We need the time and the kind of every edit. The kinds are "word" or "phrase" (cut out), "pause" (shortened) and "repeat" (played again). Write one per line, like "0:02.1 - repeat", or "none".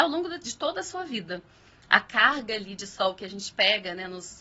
none